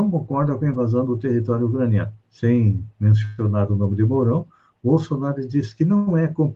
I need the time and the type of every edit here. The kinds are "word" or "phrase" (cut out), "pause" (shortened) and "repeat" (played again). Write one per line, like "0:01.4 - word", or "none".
0:02.2 - pause